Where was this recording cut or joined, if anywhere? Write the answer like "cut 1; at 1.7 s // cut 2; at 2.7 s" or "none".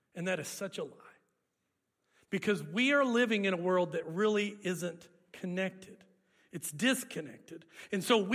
none